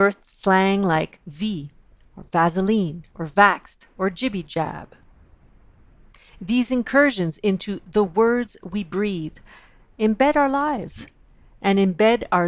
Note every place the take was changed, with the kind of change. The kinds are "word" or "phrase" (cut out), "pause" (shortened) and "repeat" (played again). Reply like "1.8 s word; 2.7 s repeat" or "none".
none